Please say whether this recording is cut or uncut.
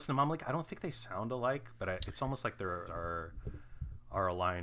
cut